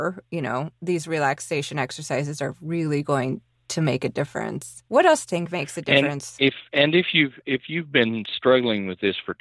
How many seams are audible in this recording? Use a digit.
2